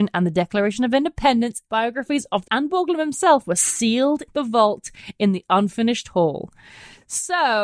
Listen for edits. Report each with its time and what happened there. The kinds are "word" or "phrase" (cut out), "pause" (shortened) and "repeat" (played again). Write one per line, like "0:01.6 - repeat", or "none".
0:01.7 - word
0:02.4 - phrase
0:04.3 - word

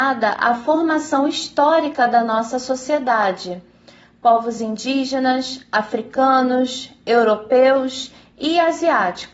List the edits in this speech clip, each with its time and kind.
none

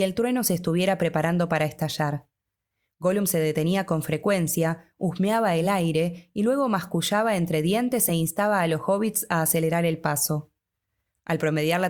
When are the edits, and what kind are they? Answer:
none

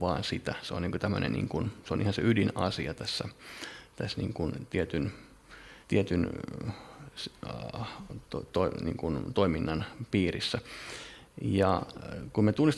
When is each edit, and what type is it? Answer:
0:05.8 - pause

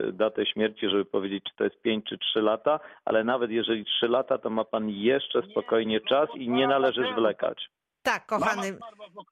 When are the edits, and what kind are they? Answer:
none

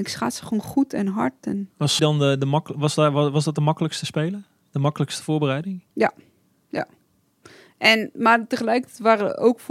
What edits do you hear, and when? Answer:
0:02.0 - word
0:05.9 - pause

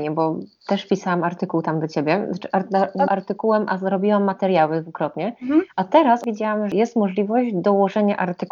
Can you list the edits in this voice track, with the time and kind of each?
0:03.1 - phrase

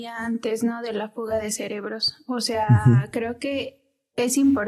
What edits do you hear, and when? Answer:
none

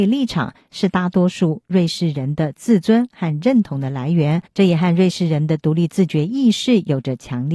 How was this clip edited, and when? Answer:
0:04.5 - pause

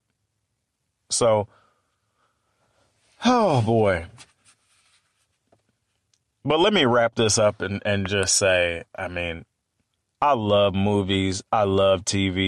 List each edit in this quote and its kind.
none

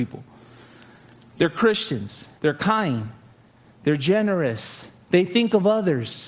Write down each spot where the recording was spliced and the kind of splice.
0:02.4 - pause
0:05.0 - pause

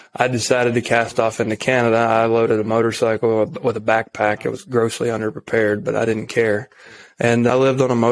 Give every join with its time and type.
none

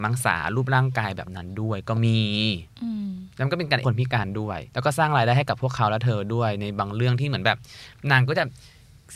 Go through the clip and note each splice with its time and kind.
0:03.8 - word
0:04.7 - pause

